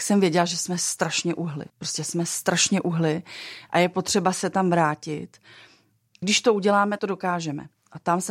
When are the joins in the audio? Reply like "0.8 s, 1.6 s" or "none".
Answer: 1.7 s, 6.2 s, 7.0 s